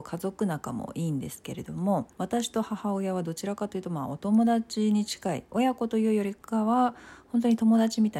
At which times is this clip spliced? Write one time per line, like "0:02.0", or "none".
0:02.1